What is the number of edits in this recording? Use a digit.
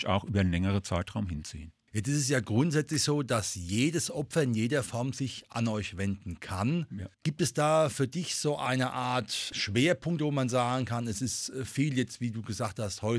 1